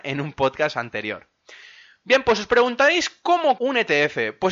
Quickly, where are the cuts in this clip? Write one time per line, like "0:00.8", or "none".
0:03.6